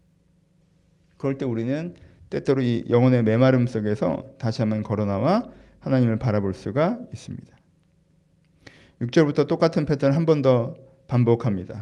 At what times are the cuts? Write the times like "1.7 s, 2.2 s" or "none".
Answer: none